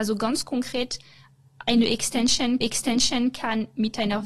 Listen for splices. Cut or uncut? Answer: cut